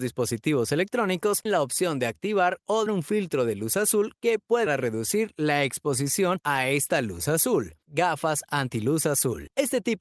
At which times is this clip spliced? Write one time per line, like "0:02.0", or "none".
0:01.5
0:02.9
0:04.7
0:07.8